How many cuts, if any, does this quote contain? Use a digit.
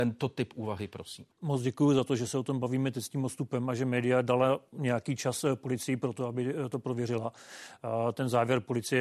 1